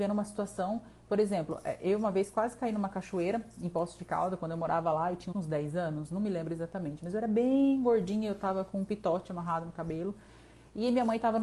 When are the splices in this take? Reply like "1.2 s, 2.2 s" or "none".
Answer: 5.3 s